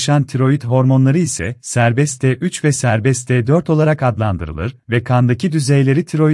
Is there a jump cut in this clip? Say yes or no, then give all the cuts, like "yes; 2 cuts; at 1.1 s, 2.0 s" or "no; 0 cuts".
no; 0 cuts